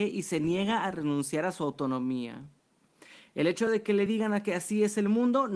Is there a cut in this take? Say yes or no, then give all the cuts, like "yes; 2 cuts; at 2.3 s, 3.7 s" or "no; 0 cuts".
no; 0 cuts